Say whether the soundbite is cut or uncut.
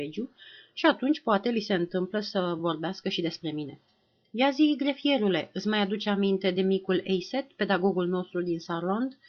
uncut